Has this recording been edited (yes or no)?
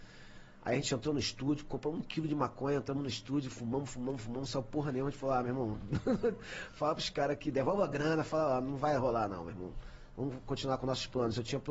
no